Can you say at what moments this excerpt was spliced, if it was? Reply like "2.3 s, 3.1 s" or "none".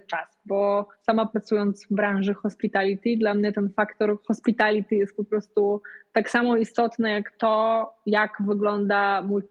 0.9 s